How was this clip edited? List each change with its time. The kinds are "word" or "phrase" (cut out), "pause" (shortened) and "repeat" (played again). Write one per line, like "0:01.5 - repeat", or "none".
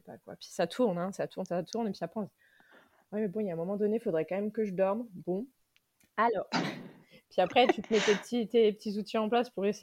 none